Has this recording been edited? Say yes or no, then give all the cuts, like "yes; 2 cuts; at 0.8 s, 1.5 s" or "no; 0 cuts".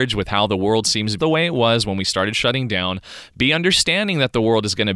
yes; 1 cut; at 1.2 s